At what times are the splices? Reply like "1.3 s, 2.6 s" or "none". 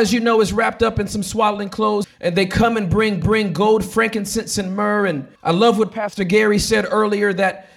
2.0 s, 3.2 s, 5.4 s